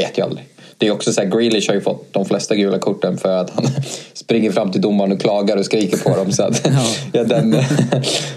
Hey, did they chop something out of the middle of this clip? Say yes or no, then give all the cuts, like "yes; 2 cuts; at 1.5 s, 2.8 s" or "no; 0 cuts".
yes; 1 cut; at 7.2 s